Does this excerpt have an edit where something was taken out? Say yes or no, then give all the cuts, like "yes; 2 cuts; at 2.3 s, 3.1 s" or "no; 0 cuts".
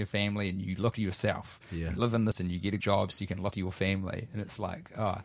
yes; 4 cuts; at 0.9 s, 2.3 s, 2.8 s, 3.5 s